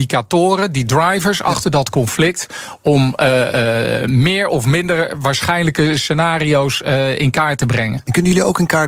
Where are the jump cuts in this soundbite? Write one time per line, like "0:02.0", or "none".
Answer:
none